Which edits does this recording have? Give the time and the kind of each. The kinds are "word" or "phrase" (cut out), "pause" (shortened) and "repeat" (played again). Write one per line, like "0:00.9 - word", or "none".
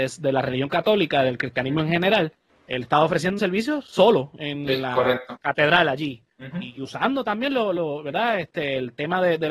0:02.5 - pause
0:03.4 - word
0:05.4 - word
0:06.3 - pause